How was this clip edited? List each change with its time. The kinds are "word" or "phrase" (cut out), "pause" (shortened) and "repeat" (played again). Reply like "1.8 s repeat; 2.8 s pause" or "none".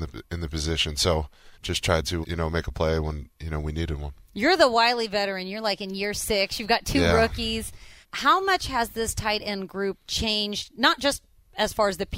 1.5 s pause; 2.2 s word; 8.0 s pause; 10.0 s pause